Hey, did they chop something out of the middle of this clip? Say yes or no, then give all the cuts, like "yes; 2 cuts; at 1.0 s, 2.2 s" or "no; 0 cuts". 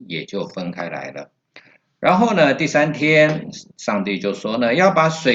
yes; 1 cut; at 3.7 s